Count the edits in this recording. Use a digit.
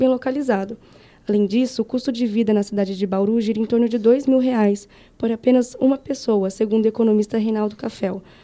0